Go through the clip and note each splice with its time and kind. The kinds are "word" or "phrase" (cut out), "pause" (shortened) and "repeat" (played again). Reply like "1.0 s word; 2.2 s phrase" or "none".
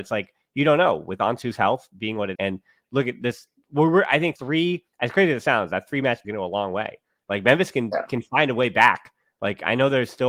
2.3 s word; 4.4 s word; 4.9 s pause; 6.2 s phrase